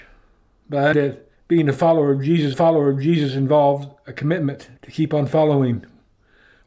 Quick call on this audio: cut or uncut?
cut